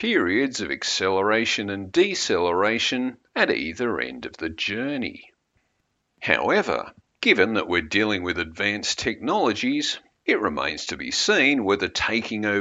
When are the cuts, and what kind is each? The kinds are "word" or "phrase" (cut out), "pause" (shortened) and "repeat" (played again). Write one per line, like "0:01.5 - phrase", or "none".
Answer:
none